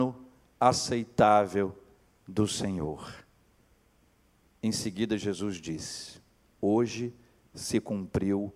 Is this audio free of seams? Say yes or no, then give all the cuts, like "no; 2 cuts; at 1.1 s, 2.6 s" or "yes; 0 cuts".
yes; 0 cuts